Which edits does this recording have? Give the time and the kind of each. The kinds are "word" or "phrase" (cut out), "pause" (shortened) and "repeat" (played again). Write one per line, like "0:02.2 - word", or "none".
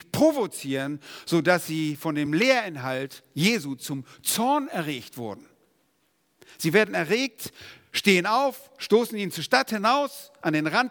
none